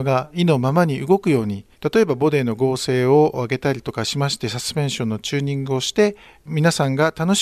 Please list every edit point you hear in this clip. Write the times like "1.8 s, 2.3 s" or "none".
1.7 s, 6.2 s